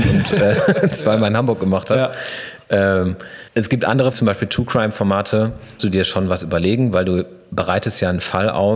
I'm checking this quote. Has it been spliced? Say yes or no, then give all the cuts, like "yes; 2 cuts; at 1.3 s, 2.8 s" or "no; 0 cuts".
yes; 3 cuts; at 3.5 s, 4.1 s, 5.8 s